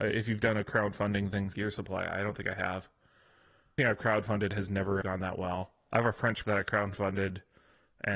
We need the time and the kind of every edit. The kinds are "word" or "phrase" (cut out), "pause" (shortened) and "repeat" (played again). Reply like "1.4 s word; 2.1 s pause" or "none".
1.5 s word; 3.8 s word; 5.0 s word; 5.9 s word; 6.4 s word